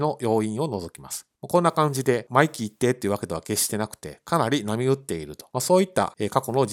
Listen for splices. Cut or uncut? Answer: cut